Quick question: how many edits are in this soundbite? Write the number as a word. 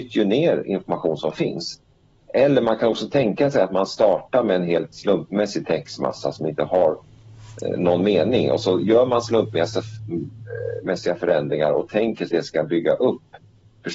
one